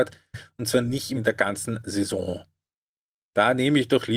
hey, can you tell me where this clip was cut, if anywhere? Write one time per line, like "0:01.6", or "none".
0:01.2